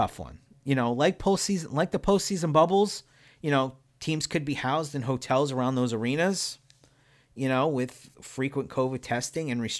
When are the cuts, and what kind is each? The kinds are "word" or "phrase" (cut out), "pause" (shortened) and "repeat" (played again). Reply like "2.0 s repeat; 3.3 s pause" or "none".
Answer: 3.9 s pause